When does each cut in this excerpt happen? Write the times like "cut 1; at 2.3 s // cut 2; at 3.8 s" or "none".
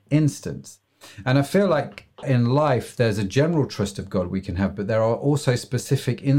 cut 1; at 2.2 s